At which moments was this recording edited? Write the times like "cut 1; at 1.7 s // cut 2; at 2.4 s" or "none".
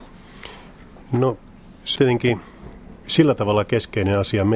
cut 1; at 2.0 s